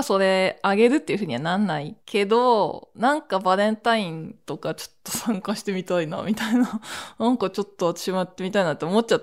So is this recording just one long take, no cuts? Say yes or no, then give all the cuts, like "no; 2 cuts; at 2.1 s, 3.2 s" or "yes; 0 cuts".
no; 1 cut; at 2.0 s